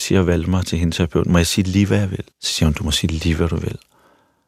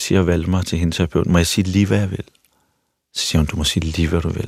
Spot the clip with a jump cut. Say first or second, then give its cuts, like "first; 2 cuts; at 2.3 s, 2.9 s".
first; 1 cut; at 2.3 s